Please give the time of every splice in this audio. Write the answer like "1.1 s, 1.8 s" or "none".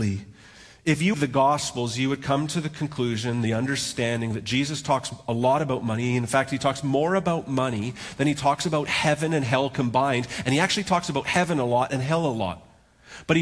1.1 s

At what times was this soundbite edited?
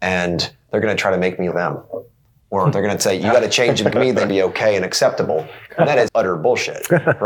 1.5 s, 3.9 s, 4.3 s, 6.1 s

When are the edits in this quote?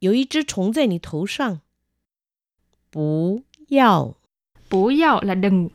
none

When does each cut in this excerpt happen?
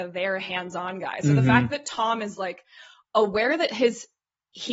none

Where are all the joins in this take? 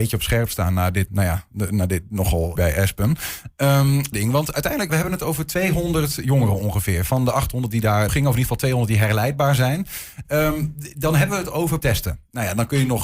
1.1 s, 2.6 s, 4.1 s, 4.9 s, 8.1 s, 11.8 s

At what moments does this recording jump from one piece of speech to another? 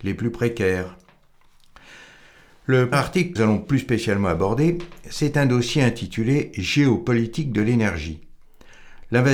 2.9 s, 3.4 s

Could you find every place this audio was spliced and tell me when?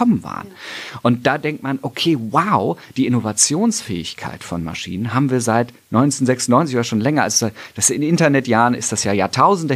none

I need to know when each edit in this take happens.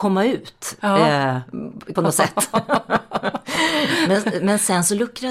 2.0 s

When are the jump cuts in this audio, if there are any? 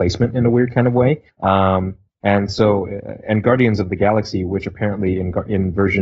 1.3 s

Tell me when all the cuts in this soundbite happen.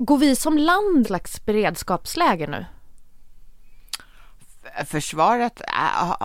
1.0 s

